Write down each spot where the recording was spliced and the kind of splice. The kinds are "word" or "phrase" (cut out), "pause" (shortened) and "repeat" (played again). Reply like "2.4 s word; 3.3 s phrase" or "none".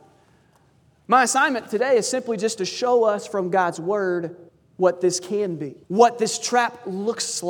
4.5 s pause; 5.8 s pause